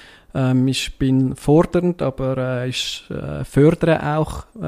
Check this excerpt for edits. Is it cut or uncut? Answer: uncut